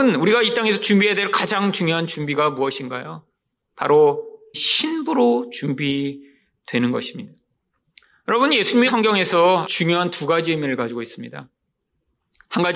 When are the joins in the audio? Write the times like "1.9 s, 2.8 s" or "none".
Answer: 4.5 s, 8.9 s, 9.6 s